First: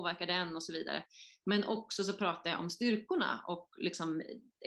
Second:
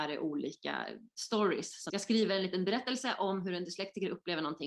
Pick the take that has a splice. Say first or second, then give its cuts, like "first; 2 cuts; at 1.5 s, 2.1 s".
second; 1 cut; at 1.9 s